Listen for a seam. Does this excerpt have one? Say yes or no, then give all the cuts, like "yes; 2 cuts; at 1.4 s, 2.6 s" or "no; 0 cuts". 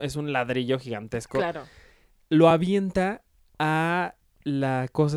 no; 0 cuts